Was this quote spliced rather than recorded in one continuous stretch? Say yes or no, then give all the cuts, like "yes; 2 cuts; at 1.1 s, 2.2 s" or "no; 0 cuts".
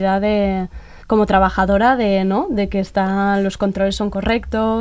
yes; 1 cut; at 1.0 s